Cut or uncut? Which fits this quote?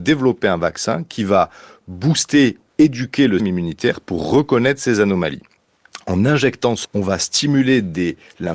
cut